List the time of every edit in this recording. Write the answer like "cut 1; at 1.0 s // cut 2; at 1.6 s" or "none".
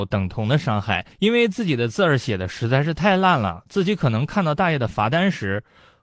cut 1; at 1.1 s